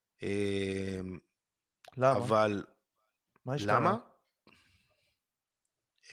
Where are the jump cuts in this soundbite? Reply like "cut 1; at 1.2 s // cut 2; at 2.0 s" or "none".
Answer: none